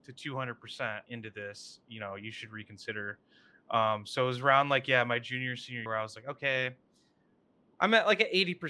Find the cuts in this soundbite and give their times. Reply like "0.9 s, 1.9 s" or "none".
1.1 s, 5.9 s